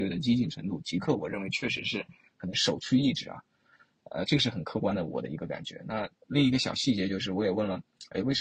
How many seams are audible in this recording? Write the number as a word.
zero